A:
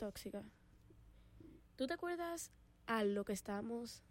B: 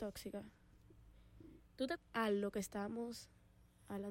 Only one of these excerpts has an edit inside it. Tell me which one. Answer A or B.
B